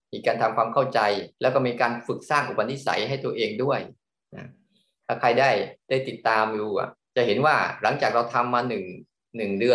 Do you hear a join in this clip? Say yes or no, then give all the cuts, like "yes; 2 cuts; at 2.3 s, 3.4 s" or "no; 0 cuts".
yes; 2 cuts; at 1.3 s, 5.8 s